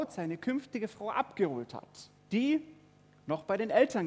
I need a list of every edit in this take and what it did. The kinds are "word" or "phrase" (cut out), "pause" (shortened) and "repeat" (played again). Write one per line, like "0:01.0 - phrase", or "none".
0:02.2 - pause